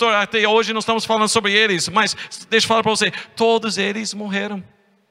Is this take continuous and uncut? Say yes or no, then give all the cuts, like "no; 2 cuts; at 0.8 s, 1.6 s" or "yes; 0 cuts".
yes; 0 cuts